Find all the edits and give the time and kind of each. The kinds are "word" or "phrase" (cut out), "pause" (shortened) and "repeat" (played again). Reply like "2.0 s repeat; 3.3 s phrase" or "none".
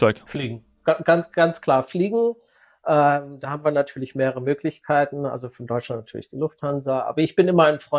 none